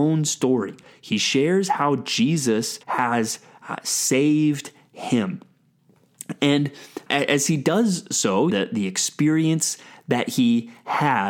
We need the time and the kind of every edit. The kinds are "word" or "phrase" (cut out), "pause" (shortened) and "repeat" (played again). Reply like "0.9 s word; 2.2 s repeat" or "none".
2.8 s pause; 7.1 s word; 8.5 s phrase